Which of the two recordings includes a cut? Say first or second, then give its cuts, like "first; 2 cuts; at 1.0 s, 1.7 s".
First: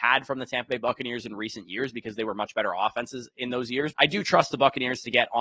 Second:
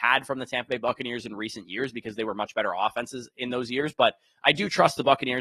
first; 1 cut; at 3.9 s